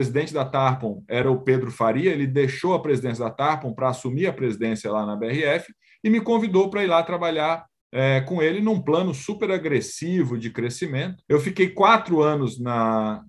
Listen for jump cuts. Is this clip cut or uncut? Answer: uncut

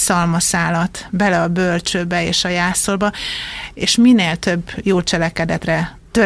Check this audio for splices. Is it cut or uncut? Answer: uncut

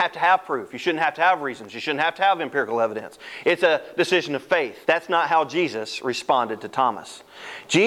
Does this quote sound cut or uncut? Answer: cut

